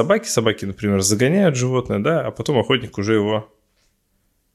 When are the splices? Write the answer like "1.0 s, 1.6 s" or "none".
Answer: none